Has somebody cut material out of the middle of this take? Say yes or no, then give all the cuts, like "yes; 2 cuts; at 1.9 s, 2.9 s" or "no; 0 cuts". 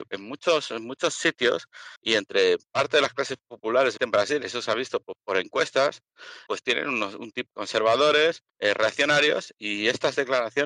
yes; 5 cuts; at 2.0 s, 4.0 s, 6.5 s, 7.5 s, 8.5 s